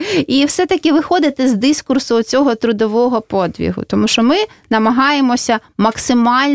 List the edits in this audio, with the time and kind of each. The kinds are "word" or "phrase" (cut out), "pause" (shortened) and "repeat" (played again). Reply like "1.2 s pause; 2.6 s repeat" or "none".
none